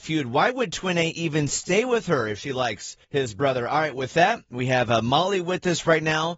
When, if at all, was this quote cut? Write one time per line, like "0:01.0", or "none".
0:03.0